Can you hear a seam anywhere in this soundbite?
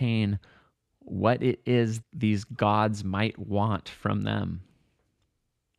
yes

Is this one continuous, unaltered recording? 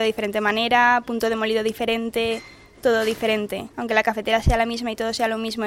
no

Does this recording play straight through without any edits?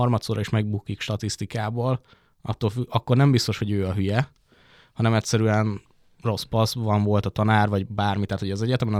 yes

